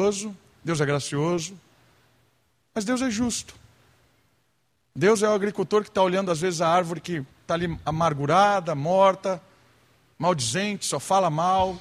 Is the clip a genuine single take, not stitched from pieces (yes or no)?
no